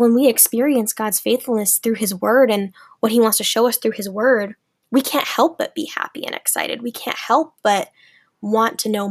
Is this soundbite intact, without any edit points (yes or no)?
yes